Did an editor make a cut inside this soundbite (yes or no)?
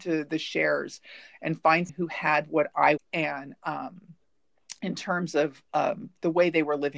yes